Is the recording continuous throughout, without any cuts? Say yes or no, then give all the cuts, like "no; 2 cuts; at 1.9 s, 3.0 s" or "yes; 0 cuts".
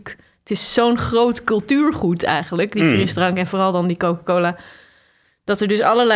yes; 0 cuts